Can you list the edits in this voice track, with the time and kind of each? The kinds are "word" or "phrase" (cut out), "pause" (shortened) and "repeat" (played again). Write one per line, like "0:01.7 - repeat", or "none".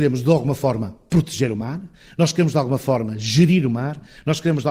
none